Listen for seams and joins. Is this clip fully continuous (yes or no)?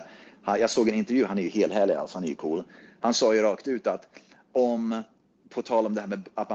yes